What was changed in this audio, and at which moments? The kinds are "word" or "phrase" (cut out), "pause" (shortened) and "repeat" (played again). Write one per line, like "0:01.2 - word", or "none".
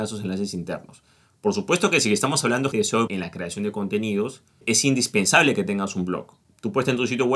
0:02.7 - word
0:03.1 - phrase